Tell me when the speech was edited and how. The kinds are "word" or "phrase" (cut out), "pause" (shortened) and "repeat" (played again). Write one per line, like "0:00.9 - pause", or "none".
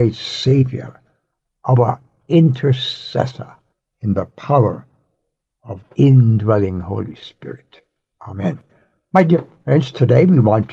none